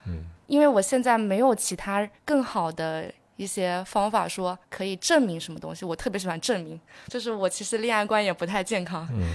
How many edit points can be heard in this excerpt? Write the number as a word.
three